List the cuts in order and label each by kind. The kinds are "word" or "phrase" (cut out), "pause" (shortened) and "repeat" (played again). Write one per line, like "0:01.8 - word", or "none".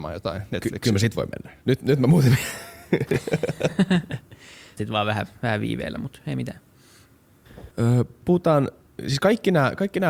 0:01.6 - pause
0:04.8 - word
0:07.7 - pause